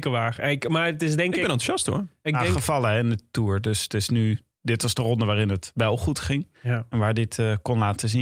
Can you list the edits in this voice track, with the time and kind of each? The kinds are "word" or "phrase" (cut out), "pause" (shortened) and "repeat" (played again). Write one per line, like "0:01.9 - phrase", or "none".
0:06.5 - pause